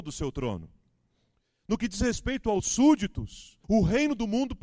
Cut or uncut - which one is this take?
cut